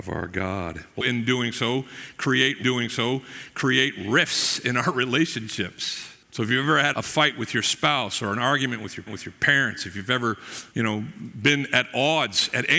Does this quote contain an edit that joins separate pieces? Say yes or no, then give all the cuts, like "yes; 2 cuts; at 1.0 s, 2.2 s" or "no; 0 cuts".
yes; 6 cuts; at 1.0 s, 2.6 s, 6.2 s, 6.9 s, 9.1 s, 10.7 s